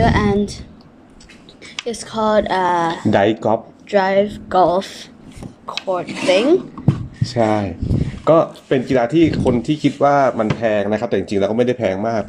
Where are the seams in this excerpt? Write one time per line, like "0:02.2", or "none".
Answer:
none